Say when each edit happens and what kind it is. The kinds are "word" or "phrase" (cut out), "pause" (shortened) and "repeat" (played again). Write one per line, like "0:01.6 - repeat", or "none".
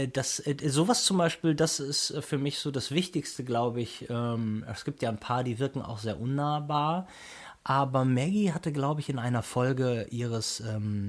none